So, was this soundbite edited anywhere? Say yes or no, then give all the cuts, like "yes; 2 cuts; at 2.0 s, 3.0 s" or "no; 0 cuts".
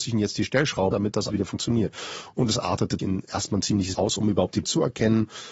yes; 5 cuts; at 0.9 s, 1.3 s, 3.0 s, 3.9 s, 4.6 s